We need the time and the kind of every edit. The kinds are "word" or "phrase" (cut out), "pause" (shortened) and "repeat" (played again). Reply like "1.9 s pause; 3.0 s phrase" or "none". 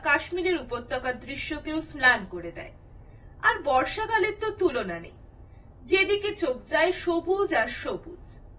none